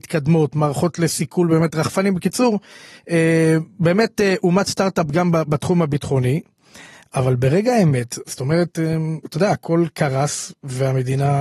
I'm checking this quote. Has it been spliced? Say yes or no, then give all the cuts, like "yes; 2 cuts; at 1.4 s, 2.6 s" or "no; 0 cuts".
no; 0 cuts